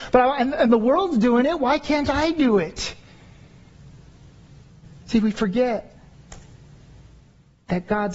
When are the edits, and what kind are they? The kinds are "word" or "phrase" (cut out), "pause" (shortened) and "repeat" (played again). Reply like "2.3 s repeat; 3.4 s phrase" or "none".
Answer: 5.0 s pause